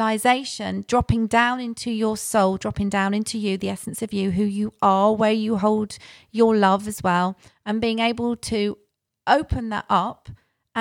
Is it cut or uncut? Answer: uncut